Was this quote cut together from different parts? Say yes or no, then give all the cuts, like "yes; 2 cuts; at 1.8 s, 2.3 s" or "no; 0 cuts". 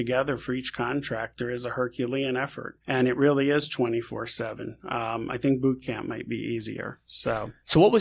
yes; 1 cut; at 2.8 s